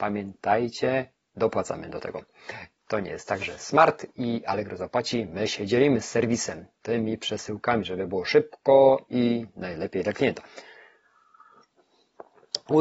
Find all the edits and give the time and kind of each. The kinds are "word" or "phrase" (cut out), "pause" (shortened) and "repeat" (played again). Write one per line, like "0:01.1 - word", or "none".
none

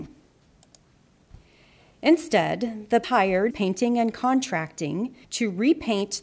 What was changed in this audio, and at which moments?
0:03.0 - word
0:03.5 - word
0:05.2 - pause

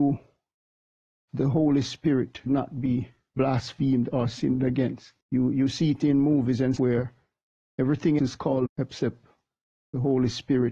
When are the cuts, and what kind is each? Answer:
0:01.3 - word
0:02.5 - word
0:05.2 - pause
0:06.8 - word
0:08.2 - word
0:08.7 - word

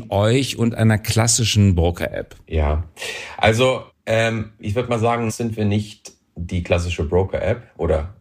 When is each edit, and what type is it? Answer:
0:02.4 - pause
0:03.9 - pause
0:05.3 - word

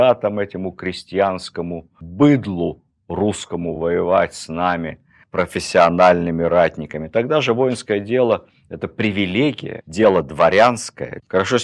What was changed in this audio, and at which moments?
none

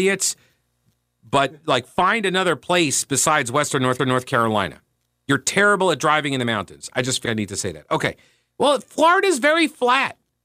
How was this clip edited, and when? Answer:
0:04.0 - repeat
0:07.2 - word

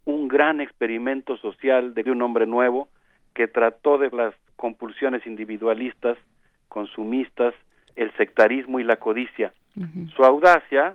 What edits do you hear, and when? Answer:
0:02.1 - word
0:04.1 - word
0:08.0 - word

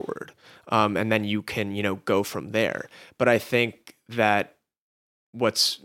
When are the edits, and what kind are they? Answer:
none

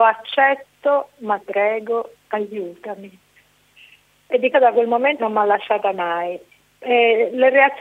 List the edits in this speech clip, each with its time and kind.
0:01.4 - word
0:04.5 - word
0:05.2 - word

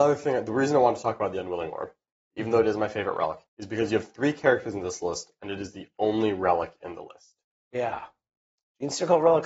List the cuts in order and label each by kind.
0:03.5 - pause

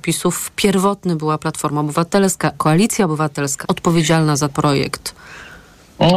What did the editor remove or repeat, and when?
0:02.5 - word
0:03.6 - word
0:04.5 - word

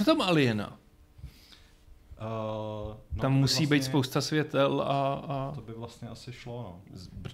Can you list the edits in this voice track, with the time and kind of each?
none

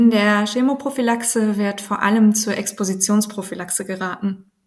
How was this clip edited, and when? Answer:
none

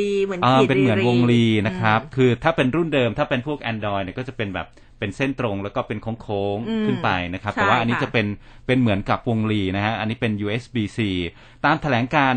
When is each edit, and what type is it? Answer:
none

